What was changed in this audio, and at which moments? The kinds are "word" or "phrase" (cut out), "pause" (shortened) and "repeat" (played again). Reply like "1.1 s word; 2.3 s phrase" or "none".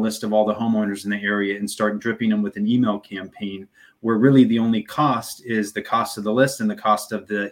none